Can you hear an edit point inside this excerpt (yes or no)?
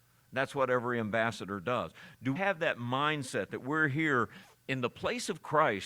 yes